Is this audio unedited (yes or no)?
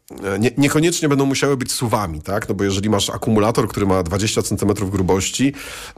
yes